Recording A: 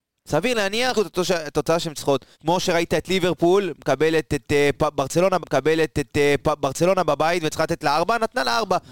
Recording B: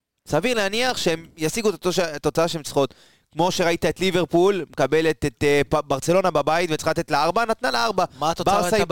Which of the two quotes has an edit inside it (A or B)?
A